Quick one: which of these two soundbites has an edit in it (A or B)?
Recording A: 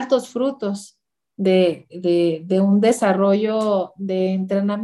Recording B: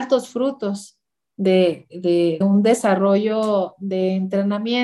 B